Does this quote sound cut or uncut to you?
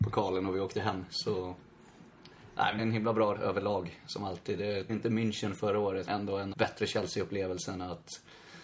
cut